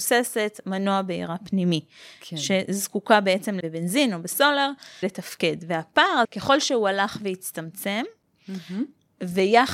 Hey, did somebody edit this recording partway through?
yes; 3 cuts; at 3.6 s, 5.0 s, 6.2 s

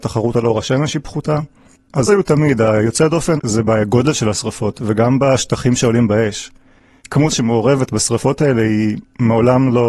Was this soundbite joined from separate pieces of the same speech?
yes; 3 cuts; at 2.1 s, 3.4 s, 7.3 s

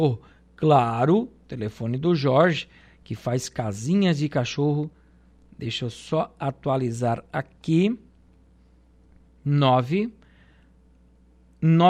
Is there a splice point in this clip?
no; 0 cuts

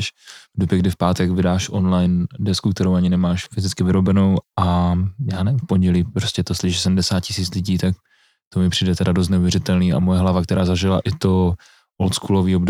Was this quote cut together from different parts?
no; 0 cuts

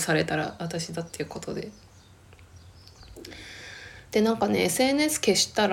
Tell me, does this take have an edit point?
no; 0 cuts

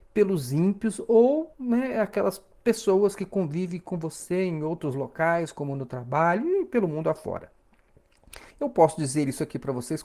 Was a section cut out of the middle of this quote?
yes; 2 cuts; at 1.5 s, 8.5 s

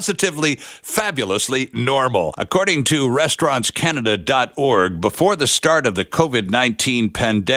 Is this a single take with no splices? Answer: yes; 0 cuts

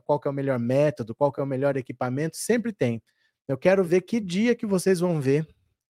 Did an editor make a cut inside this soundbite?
no; 0 cuts

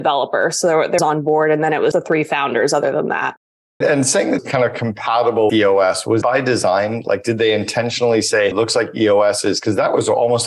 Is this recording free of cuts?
no; 7 cuts; at 1.0 s, 1.9 s, 3.8 s, 4.4 s, 5.5 s, 6.2 s, 8.5 s

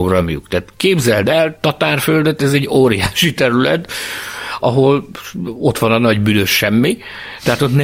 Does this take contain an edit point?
yes; 1 cut; at 4.6 s

